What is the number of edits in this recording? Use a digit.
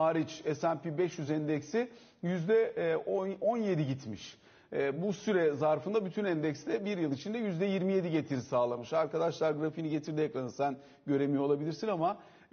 0